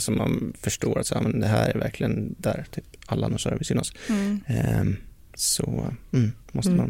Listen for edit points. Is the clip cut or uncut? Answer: uncut